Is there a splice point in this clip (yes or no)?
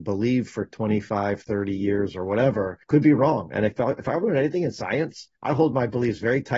yes